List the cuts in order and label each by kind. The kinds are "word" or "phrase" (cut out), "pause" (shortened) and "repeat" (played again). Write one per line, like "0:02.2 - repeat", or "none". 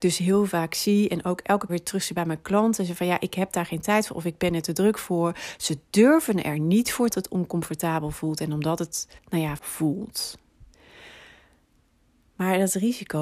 0:01.7 - word
0:07.1 - phrase
0:09.2 - pause
0:09.6 - phrase